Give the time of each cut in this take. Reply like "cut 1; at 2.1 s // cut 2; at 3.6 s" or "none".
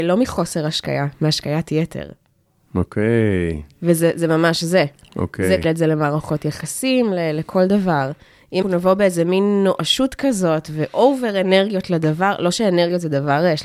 cut 1; at 5.6 s // cut 2; at 8.6 s